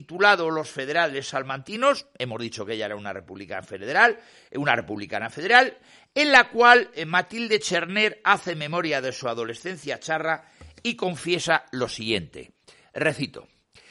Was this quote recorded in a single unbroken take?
yes; 0 cuts

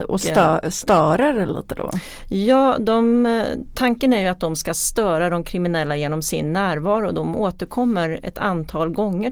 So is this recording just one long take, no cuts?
yes; 0 cuts

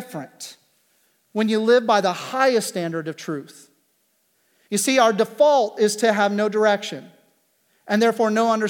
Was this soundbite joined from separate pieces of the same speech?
no; 0 cuts

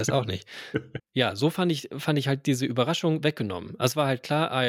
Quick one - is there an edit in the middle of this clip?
yes; 1 cut; at 1.0 s

